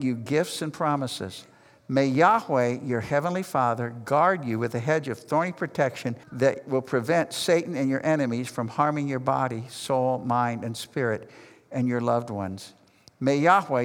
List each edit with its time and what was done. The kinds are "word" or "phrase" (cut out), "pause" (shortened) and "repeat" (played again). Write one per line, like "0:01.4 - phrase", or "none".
0:06.2 - pause